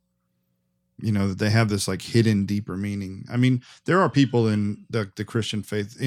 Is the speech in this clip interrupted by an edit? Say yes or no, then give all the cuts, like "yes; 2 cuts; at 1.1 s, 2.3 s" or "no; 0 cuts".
no; 0 cuts